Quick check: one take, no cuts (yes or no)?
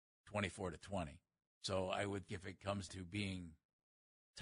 no